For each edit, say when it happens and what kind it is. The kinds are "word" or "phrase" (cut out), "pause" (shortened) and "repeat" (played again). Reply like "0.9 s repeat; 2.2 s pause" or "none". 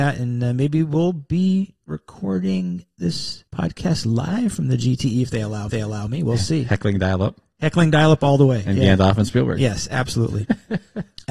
3.5 s pause; 5.7 s repeat

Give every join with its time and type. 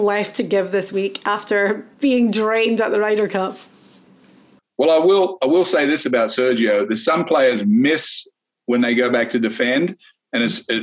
1.9 s pause

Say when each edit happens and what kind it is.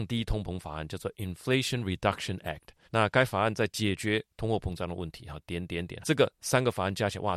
2.9 s pause; 6.0 s word

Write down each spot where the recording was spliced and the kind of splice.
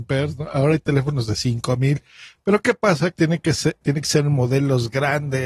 3.2 s word; 3.8 s word

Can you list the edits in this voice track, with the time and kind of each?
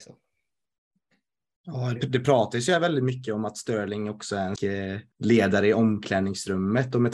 2.0 s word; 4.6 s word; 5.1 s pause

